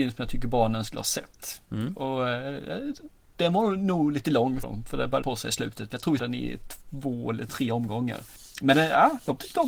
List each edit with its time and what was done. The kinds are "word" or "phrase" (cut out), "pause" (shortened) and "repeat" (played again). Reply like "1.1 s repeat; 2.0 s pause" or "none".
4.6 s word; 5.2 s word; 6.2 s word